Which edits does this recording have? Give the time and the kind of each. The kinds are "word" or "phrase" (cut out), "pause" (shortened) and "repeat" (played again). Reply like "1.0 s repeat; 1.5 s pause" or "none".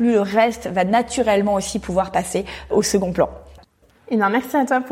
none